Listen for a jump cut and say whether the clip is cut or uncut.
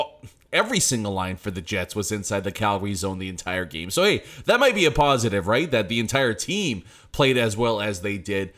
uncut